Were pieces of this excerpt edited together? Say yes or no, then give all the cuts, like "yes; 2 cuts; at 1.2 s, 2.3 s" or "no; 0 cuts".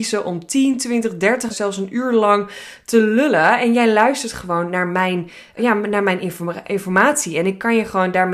yes; 2 cuts; at 1.5 s, 5.6 s